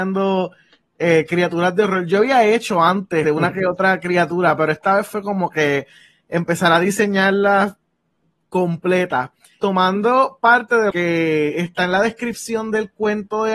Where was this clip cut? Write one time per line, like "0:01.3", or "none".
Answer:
0:03.2
0:09.6
0:10.9